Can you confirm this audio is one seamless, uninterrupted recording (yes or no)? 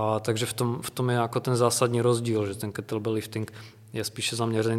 yes